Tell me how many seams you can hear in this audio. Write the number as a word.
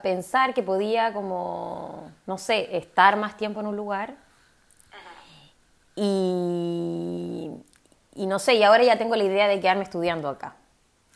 zero